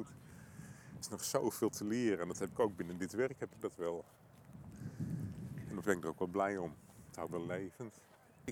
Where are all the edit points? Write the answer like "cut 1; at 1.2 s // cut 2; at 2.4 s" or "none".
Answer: cut 1; at 1.0 s // cut 2; at 5.8 s // cut 3; at 7.3 s